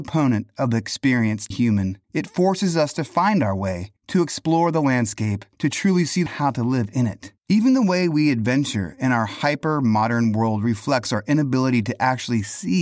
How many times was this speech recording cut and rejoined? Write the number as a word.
six